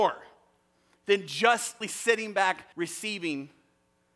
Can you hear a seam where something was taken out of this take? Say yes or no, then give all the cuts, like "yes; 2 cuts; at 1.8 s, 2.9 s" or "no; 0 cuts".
yes; 2 cuts; at 1.8 s, 2.7 s